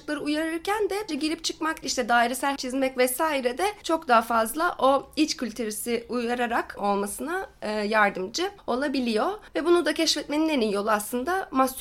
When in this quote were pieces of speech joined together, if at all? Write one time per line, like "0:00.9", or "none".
0:01.1
0:01.8
0:02.6
0:06.8